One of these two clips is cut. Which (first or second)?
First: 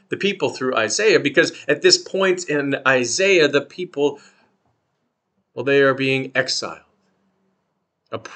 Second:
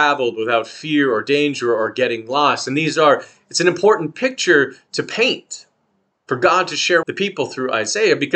second